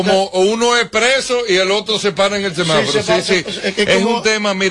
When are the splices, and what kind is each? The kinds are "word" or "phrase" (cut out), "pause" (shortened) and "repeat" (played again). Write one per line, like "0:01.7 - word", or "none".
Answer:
none